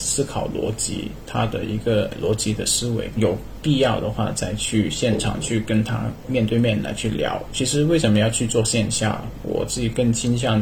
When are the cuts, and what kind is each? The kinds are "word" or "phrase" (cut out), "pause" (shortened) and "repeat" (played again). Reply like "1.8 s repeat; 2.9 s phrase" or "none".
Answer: none